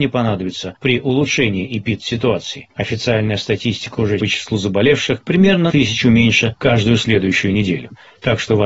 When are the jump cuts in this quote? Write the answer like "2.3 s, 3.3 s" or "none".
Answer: 4.2 s, 5.7 s